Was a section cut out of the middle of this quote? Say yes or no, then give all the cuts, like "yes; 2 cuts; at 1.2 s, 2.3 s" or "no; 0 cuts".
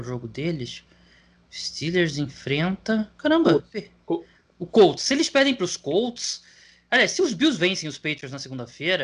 no; 0 cuts